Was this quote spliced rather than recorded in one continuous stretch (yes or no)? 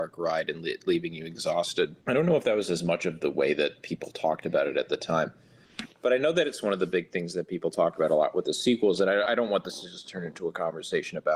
yes